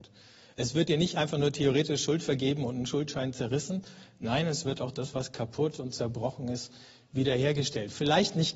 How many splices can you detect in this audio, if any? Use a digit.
0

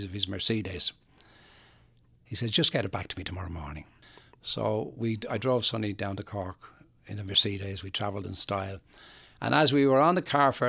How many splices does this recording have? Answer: 0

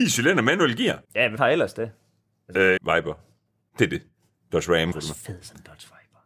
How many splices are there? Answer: 4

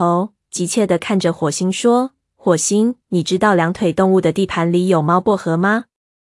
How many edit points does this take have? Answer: 1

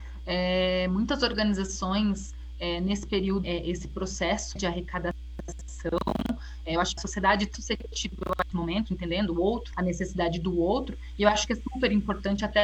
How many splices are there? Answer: 6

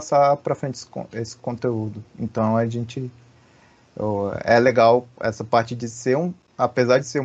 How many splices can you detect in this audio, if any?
2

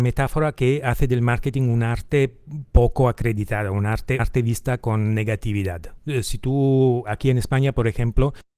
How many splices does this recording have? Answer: 2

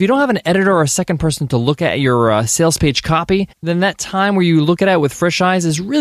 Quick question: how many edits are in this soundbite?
1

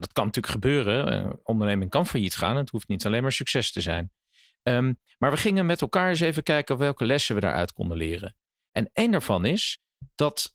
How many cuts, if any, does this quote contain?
0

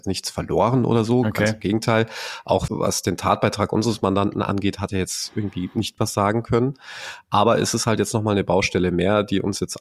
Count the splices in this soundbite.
2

